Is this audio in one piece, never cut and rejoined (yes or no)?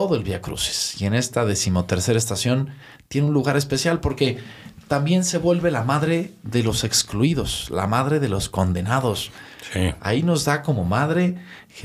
yes